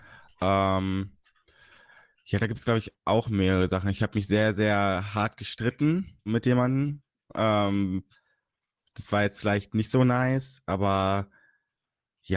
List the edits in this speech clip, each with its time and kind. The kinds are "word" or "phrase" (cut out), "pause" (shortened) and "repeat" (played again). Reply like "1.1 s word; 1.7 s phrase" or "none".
6.3 s word